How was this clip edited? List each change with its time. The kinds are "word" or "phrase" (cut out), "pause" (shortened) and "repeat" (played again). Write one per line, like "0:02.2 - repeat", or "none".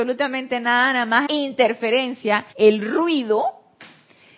0:01.3 - word
0:02.5 - pause